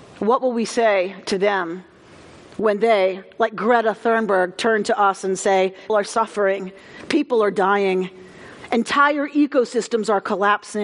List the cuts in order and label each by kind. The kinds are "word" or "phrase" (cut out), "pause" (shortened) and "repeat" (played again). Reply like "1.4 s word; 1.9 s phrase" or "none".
5.9 s word